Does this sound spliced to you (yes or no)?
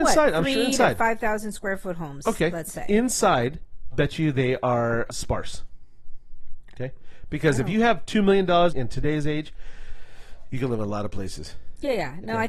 yes